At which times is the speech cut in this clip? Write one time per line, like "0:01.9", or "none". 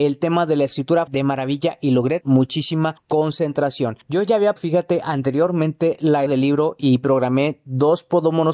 0:01.1
0:02.2
0:04.6
0:06.3